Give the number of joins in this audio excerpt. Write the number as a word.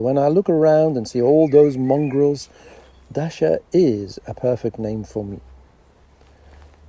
zero